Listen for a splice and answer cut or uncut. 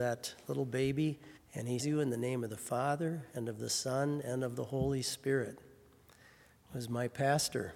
cut